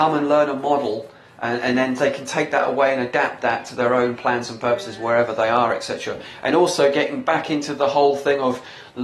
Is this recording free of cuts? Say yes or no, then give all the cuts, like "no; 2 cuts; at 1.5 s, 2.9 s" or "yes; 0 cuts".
yes; 0 cuts